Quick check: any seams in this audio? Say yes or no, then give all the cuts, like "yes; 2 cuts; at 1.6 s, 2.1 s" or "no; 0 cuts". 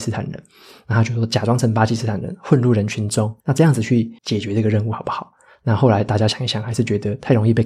yes; 2 cuts; at 3.4 s, 4.2 s